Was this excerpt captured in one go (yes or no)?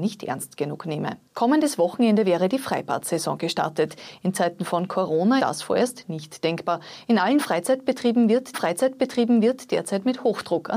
no